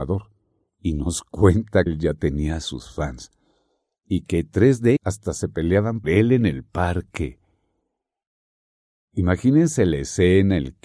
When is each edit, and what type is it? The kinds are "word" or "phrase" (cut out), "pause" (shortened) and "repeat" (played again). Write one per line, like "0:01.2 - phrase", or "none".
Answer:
0:01.9 - word
0:05.0 - word
0:06.0 - word